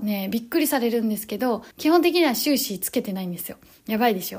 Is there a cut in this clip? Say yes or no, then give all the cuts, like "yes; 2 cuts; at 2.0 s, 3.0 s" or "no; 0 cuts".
yes; 1 cut; at 1.7 s